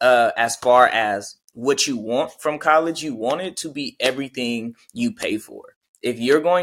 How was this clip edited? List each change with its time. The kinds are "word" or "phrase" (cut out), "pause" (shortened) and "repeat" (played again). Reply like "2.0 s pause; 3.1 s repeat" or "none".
none